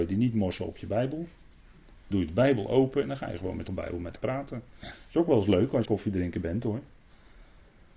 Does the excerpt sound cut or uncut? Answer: cut